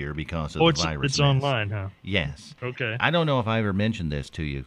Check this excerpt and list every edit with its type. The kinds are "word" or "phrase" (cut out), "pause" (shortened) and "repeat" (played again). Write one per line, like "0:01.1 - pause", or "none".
0:02.6 - pause

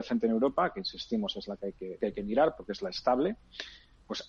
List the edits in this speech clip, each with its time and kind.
0:02.0 - word

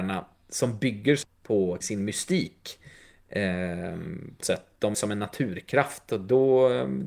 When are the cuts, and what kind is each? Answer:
0:01.2 - word
0:01.8 - word
0:04.4 - word
0:04.9 - word

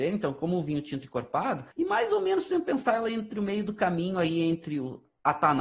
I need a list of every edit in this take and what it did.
0:01.7 - pause

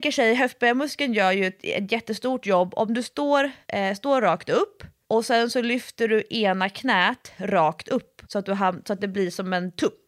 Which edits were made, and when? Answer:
0:03.6 - pause
0:05.0 - pause
0:08.2 - pause

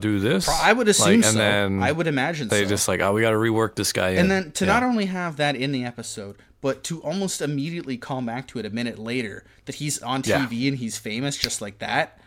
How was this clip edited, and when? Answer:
none

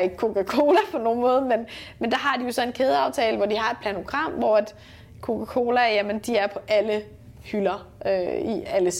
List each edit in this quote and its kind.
none

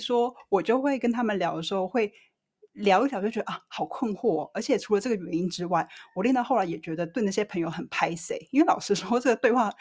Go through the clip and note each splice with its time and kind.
none

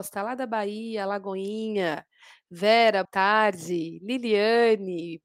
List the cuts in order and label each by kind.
0:03.0 - word

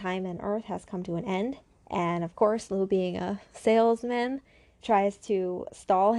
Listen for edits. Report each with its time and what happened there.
0:01.7 - pause
0:04.8 - word

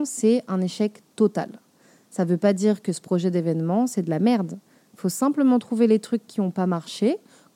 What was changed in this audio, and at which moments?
none

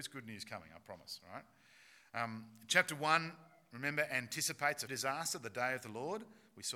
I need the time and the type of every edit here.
0:04.9 - word

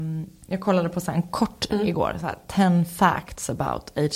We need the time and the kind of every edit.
0:01.7 - word

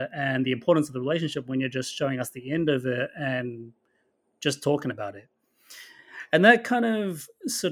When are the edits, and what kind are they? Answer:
none

